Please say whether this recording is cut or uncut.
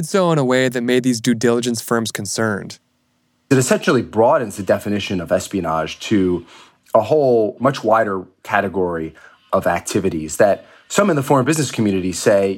uncut